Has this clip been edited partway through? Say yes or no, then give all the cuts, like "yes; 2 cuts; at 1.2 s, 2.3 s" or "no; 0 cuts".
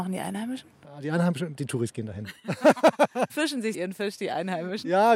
yes; 3 cuts; at 1.6 s, 3.3 s, 3.7 s